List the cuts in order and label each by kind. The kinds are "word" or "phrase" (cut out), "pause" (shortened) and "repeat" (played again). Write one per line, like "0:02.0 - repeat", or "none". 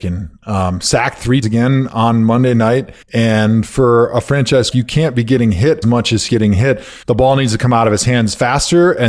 0:01.4 - word
0:03.0 - pause
0:04.7 - word
0:05.8 - word
0:06.3 - phrase
0:07.0 - pause